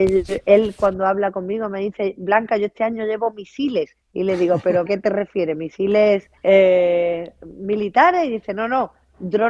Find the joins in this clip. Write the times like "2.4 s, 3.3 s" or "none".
4.0 s, 4.9 s, 6.4 s